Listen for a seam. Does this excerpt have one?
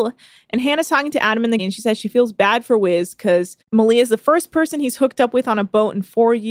yes; 2 cuts; at 1.6 s, 3.6 s

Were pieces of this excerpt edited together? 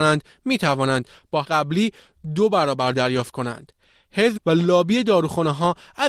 yes; 3 cuts; at 1.4 s, 2.9 s, 4.4 s

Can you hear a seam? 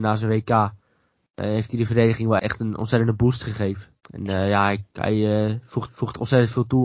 yes; 4 cuts; at 2.4 s, 4.0 s, 4.9 s, 5.9 s

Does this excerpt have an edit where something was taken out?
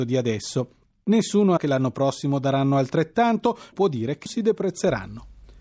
yes; 3 cuts; at 1.6 s, 3.7 s, 4.3 s

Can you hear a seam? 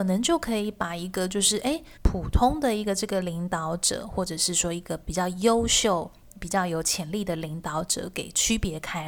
yes; 1 cut; at 2.0 s

